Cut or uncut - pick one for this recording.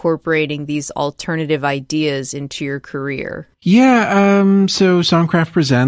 cut